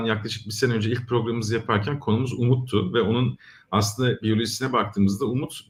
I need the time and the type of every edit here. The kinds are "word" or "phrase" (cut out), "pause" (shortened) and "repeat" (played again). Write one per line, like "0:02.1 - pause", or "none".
none